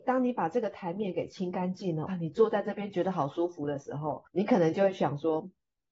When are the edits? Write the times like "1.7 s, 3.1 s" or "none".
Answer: 2.1 s, 4.3 s